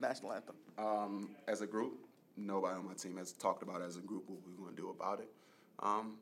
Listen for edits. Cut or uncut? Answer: uncut